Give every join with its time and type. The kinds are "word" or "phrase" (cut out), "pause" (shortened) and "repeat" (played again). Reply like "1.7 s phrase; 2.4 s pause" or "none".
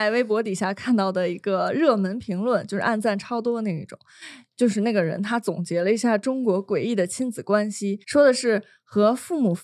8.0 s pause